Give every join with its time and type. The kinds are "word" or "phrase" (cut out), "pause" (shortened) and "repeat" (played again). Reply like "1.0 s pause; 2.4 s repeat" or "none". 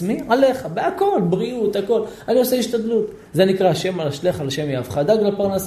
none